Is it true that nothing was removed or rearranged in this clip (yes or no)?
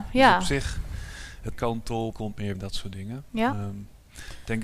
no